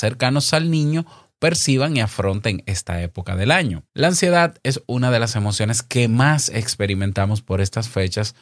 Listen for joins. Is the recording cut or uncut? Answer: cut